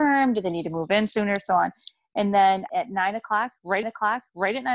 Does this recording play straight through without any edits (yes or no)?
no